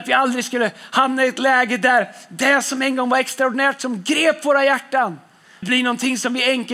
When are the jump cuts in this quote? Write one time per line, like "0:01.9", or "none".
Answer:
0:05.6